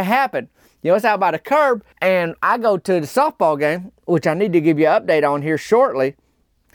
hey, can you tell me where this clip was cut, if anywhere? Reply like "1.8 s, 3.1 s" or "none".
1.9 s